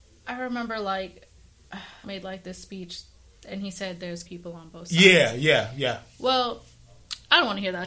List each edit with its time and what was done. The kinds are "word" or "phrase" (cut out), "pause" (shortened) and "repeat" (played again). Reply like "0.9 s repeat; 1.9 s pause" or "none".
2.0 s word; 4.3 s word